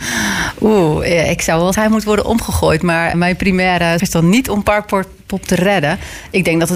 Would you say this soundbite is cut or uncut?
cut